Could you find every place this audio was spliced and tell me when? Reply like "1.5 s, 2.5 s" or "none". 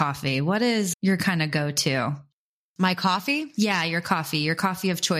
0.9 s